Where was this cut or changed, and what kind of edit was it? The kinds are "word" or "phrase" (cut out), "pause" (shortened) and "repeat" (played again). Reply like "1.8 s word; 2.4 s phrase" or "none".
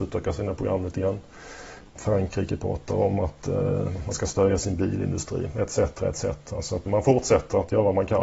6.9 s word